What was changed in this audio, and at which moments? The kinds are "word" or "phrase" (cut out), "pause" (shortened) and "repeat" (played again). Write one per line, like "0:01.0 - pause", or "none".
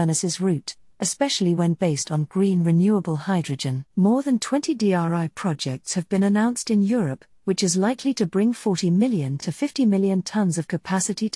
0:03.9 - pause